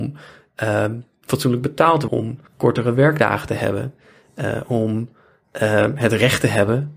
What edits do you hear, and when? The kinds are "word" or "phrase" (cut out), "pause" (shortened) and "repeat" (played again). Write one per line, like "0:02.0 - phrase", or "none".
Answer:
0:02.1 - phrase
0:02.5 - pause